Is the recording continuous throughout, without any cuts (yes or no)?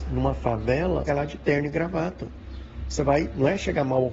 no